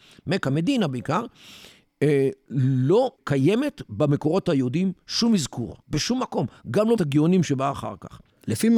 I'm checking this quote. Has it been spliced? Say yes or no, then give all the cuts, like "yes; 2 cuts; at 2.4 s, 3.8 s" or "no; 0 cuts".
yes; 3 cuts; at 3.1 s, 5.8 s, 7.0 s